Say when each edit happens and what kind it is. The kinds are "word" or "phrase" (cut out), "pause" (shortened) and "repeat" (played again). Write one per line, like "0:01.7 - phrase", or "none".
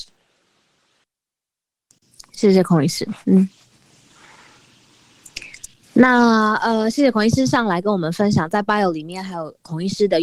0:03.2 - pause